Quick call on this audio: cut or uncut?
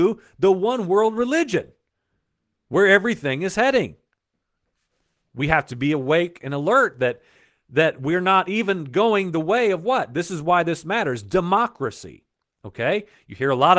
uncut